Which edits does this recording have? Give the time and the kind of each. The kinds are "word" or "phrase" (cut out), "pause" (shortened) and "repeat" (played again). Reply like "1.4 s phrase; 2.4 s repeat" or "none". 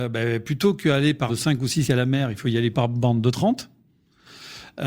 1.3 s word; 1.8 s word; 2.7 s word